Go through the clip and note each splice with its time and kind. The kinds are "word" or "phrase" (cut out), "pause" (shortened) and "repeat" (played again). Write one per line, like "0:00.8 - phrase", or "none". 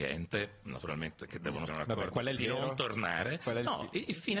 0:01.7 - word
0:02.4 - word